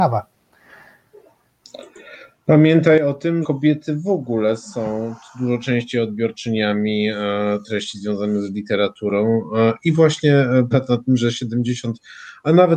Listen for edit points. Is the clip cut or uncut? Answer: cut